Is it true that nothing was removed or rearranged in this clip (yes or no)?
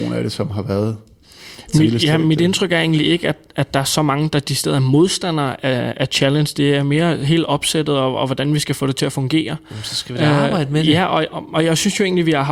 yes